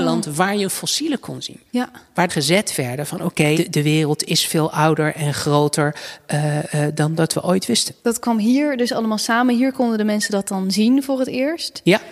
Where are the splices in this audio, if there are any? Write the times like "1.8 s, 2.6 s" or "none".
1.7 s, 2.3 s, 3.5 s, 8.0 s